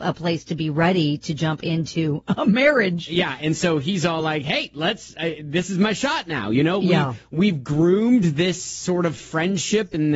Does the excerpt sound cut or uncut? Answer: uncut